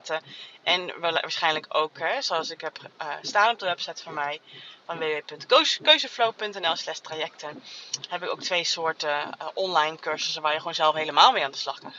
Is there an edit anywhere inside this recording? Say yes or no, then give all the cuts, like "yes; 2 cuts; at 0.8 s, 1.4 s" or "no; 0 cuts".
no; 0 cuts